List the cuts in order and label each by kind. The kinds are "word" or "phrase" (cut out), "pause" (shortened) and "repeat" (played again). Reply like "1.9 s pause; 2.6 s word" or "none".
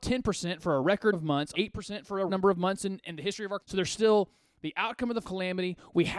1.1 s word; 1.5 s word; 2.3 s word; 3.0 s word; 3.6 s word; 5.2 s word